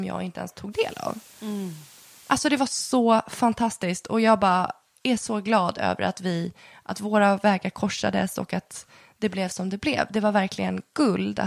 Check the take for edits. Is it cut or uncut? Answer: uncut